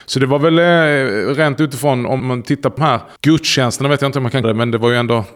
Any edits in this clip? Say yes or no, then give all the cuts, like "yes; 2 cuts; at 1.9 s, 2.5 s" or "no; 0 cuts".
yes; 4 cuts; at 2.2 s, 2.8 s, 3.2 s, 4.4 s